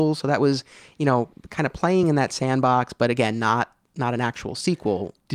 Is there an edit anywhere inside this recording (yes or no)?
no